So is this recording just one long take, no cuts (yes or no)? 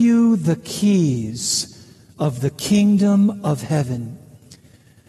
yes